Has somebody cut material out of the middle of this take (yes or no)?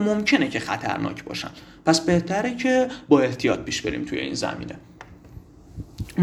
no